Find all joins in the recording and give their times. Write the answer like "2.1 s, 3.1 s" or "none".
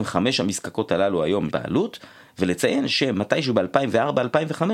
1.5 s